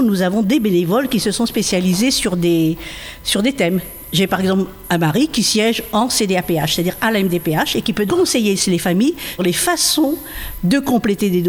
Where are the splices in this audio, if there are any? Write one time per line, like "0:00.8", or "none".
0:08.1
0:09.4